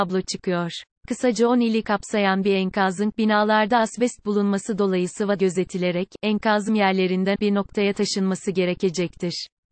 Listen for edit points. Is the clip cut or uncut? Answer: cut